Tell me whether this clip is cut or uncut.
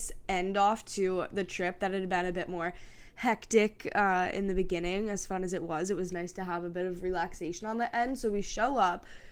uncut